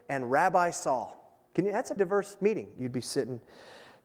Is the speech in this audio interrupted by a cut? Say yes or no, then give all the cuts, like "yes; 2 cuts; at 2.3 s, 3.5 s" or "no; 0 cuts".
yes; 1 cut; at 2.0 s